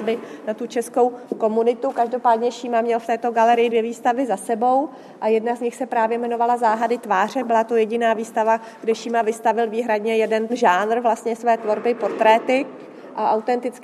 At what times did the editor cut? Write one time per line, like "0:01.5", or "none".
none